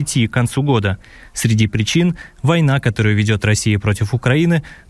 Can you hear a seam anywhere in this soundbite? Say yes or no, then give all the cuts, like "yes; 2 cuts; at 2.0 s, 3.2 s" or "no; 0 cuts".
no; 0 cuts